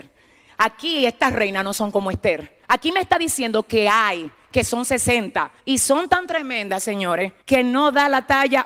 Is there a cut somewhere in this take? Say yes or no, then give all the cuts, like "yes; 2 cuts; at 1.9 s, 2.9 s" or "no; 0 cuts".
yes; 3 cuts; at 2.6 s, 5.6 s, 7.4 s